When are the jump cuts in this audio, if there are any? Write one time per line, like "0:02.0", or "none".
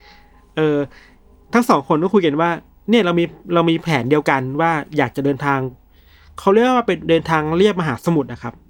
none